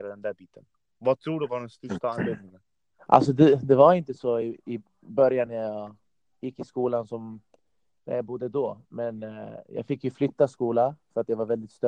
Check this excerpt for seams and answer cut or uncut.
uncut